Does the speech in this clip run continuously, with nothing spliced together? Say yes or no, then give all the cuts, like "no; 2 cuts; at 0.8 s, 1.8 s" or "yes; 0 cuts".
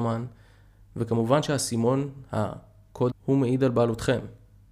no; 1 cut; at 3.1 s